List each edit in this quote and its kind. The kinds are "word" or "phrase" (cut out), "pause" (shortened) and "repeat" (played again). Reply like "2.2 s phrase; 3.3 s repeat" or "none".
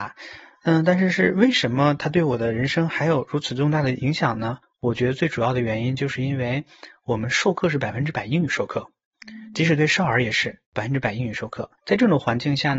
4.6 s pause; 10.6 s pause; 11.8 s pause